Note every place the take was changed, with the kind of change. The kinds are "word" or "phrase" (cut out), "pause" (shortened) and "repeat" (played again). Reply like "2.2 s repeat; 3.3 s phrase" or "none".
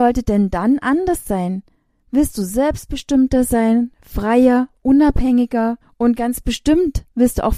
1.7 s pause; 5.8 s pause